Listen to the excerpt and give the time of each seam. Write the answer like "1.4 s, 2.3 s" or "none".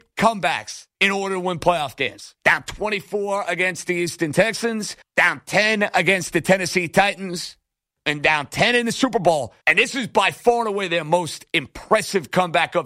0.9 s, 2.4 s, 5.0 s, 7.9 s, 9.6 s